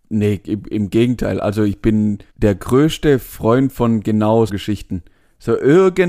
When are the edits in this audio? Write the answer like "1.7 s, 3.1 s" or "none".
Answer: 2.3 s, 4.5 s